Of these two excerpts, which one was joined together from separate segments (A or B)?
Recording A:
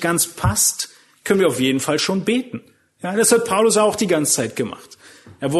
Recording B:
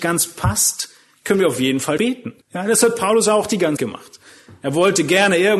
B